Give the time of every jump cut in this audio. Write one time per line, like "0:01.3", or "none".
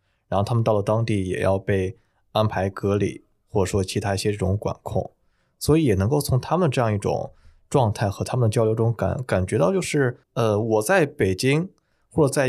0:10.2